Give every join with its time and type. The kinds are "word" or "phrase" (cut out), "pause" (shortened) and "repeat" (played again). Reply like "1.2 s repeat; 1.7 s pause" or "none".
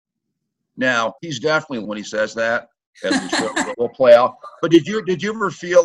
1.2 s pause; 1.8 s word; 3.7 s word